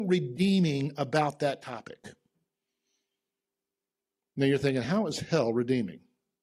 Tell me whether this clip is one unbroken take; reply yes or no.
yes